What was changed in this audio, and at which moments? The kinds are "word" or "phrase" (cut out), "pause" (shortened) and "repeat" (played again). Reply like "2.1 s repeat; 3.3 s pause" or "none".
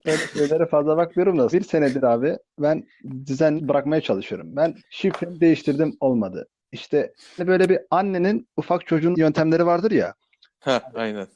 1.5 s word; 3.6 s phrase; 4.8 s pause; 7.4 s word; 9.1 s phrase